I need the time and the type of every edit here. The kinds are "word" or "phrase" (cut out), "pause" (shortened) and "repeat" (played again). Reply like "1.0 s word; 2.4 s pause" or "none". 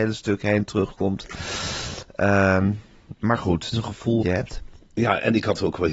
3.7 s phrase; 4.2 s word